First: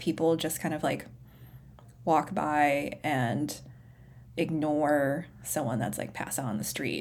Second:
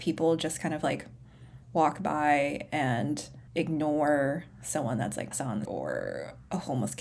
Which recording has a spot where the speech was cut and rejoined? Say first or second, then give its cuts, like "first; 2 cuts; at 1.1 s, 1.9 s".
second; 4 cuts; at 1.6 s, 3.5 s, 5.3 s, 5.6 s